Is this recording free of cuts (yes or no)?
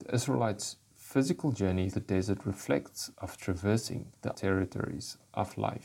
no